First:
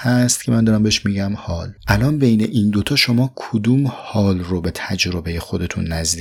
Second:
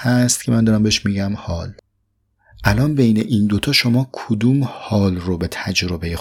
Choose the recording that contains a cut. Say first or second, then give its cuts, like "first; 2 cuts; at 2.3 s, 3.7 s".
first; 1 cut; at 1.8 s